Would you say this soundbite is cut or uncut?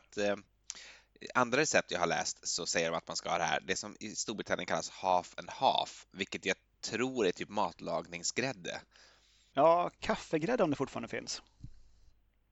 uncut